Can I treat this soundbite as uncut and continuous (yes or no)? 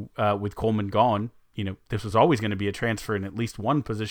yes